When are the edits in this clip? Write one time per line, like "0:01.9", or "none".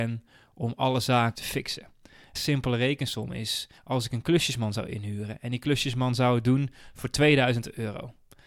0:01.4
0:02.4
0:03.8